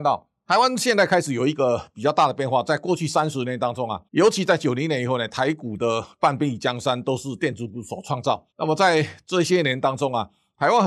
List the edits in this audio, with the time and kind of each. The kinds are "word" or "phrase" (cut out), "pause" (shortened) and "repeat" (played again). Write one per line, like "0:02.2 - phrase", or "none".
0:04.1 - pause
0:08.5 - pause

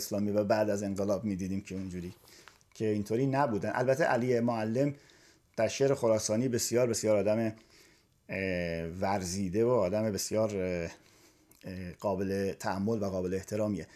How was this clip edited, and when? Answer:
none

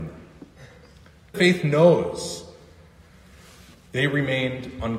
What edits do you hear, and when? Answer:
0:01.3 - phrase

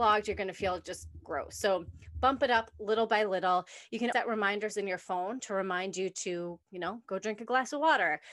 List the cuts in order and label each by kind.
0:04.1 - word
0:06.6 - pause

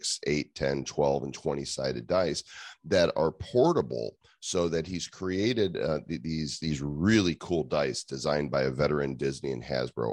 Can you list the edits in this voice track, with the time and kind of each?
none

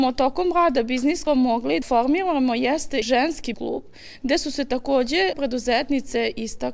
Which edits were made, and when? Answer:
0:01.3 - word
0:01.8 - word
0:03.0 - word
0:03.5 - word
0:05.3 - word

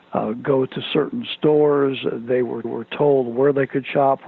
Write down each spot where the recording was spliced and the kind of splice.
0:02.6 - repeat

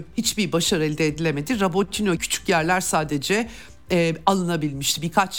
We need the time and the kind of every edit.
0:02.2 - word

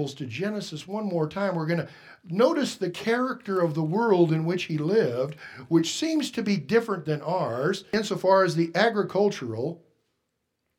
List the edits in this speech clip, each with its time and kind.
none

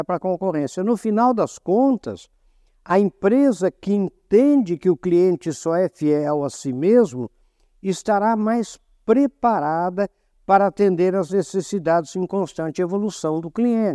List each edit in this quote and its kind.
none

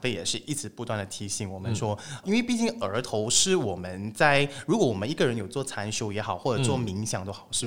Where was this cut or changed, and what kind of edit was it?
0:02.2 - phrase

